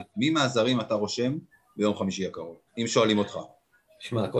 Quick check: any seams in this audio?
yes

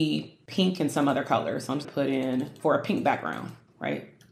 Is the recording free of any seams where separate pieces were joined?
no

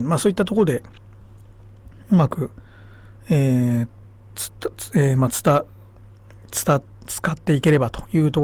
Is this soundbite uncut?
yes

